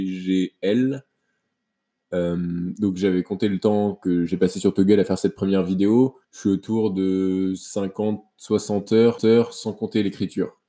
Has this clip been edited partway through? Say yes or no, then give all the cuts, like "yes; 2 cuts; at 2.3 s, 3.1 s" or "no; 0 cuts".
yes; 2 cuts; at 6.2 s, 9.2 s